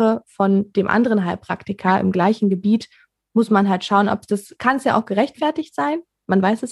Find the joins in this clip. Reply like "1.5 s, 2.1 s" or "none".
none